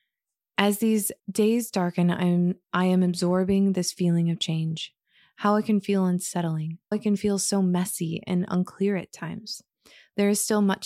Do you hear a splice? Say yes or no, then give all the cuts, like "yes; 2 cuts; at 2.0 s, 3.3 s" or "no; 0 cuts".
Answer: yes; 3 cuts; at 1.2 s, 2.6 s, 6.9 s